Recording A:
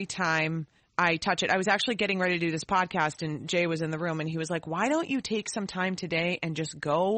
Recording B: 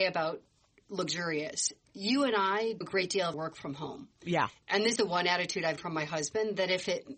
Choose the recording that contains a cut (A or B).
B